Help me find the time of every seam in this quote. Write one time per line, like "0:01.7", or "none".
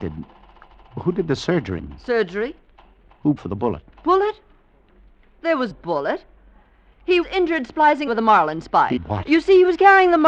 0:01.8
0:03.4
0:03.9
0:05.7
0:07.2
0:08.1
0:09.0